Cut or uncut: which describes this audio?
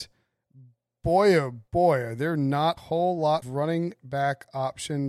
cut